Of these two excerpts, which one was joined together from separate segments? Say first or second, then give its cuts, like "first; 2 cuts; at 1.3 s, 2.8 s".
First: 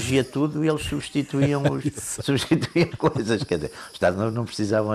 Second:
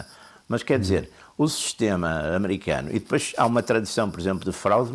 first; 1 cut; at 2.9 s